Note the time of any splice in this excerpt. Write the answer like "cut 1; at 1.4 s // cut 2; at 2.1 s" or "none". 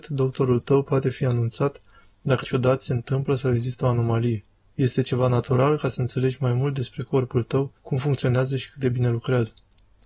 cut 1; at 2.4 s // cut 2; at 4.6 s // cut 3; at 7.8 s